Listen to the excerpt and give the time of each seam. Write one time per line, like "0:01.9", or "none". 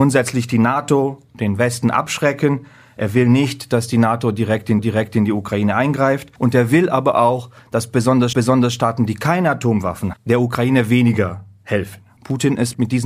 0:04.8
0:06.4
0:08.3
0:10.1

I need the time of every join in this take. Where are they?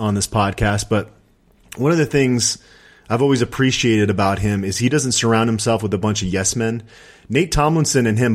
none

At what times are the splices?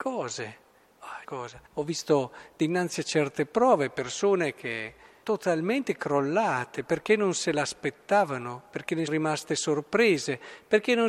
0:01.2
0:01.7
0:05.2
0:09.1

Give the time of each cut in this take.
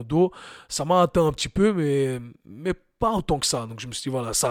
none

